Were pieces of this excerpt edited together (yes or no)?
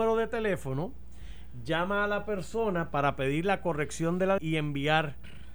yes